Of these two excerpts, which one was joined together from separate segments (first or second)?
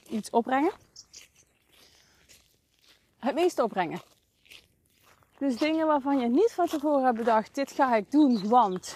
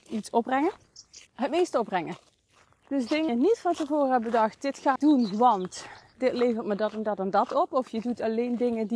second